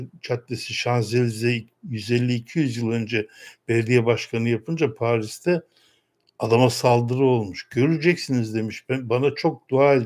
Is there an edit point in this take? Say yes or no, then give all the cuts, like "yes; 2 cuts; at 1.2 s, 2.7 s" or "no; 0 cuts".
no; 0 cuts